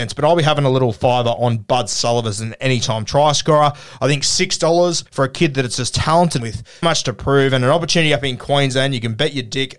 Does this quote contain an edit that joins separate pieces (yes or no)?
yes